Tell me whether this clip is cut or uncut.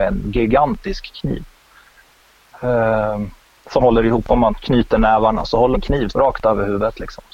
cut